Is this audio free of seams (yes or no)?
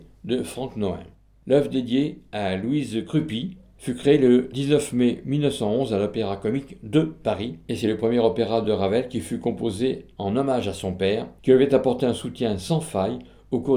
yes